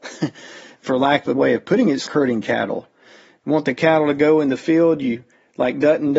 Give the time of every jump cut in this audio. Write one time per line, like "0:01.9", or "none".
0:01.3
0:02.1

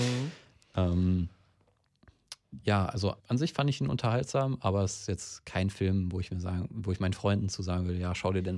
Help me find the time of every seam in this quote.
0:03.2

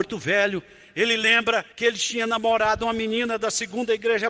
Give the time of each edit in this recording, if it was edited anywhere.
0:01.7

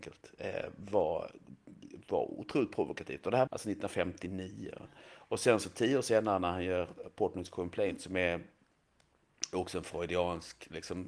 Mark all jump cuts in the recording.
0:03.5

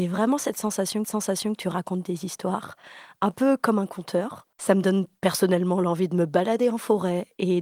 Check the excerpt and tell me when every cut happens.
0:01.0
0:04.5

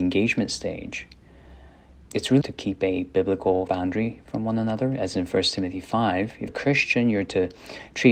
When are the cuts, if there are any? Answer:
0:02.0
0:02.4
0:03.7
0:05.1
0:06.5

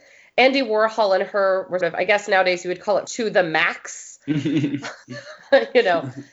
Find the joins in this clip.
0:01.8
0:03.1

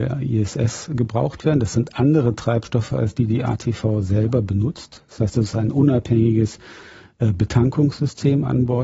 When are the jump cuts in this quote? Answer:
none

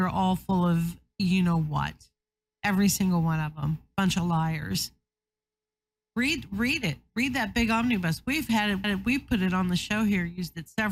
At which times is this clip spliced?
0:08.8

